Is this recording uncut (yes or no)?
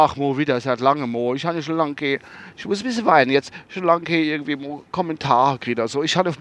yes